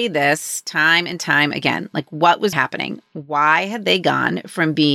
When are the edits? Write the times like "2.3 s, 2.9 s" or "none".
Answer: 2.5 s